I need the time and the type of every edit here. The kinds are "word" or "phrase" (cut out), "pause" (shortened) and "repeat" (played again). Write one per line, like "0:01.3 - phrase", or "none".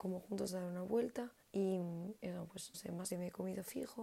0:01.4 - pause
0:02.7 - word
0:03.1 - word